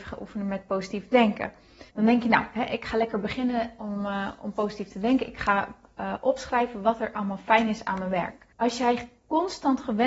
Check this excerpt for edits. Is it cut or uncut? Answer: cut